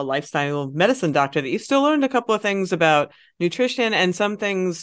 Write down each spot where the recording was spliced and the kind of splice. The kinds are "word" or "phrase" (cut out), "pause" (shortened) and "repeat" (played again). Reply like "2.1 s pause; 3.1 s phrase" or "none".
none